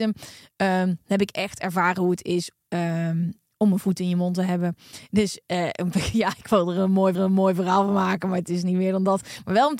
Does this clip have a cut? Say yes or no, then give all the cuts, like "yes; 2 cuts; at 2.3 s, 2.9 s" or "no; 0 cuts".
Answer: yes; 2 cuts; at 5.9 s, 7.1 s